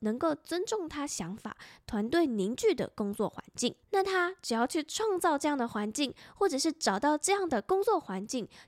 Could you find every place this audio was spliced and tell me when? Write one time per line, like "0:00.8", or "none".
0:03.8